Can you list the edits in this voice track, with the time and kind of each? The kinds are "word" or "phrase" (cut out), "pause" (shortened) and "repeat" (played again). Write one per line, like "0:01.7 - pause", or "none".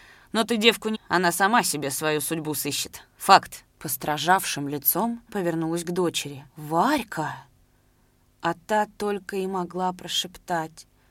0:00.9 - word
0:03.7 - pause
0:05.3 - word
0:06.5 - pause